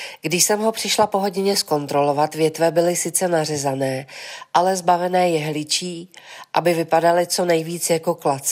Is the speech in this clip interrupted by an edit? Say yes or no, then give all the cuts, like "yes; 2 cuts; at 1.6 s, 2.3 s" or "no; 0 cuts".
no; 0 cuts